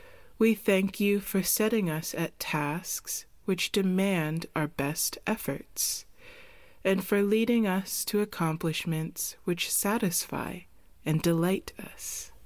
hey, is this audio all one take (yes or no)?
yes